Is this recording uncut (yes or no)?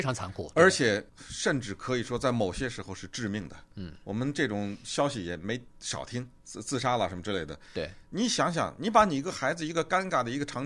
no